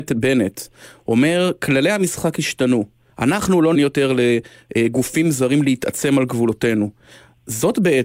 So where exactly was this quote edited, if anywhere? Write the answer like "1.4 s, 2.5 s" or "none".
3.7 s